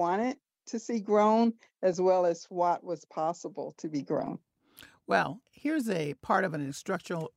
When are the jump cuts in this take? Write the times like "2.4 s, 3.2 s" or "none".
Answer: none